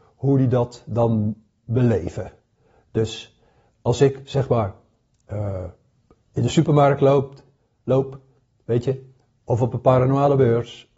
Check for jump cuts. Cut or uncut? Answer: uncut